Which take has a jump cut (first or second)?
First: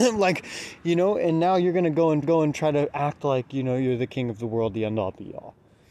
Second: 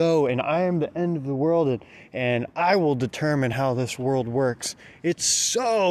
first